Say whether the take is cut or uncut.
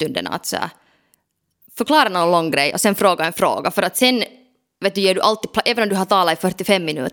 uncut